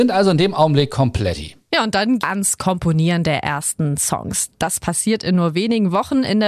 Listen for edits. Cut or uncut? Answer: cut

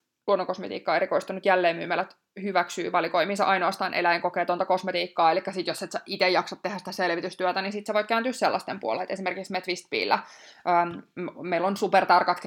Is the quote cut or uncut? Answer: uncut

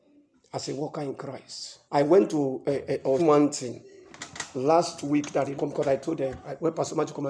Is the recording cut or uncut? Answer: cut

